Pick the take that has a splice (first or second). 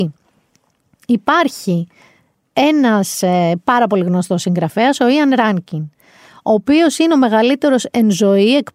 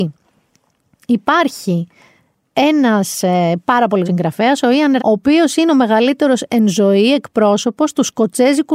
second